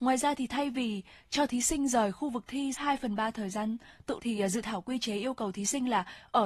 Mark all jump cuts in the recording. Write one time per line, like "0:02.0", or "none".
0:02.7
0:04.2